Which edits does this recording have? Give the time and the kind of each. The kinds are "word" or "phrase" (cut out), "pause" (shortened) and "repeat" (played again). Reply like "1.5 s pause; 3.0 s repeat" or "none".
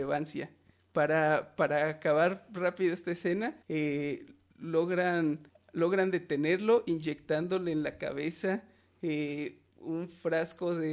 3.6 s pause; 5.5 s pause; 9.7 s pause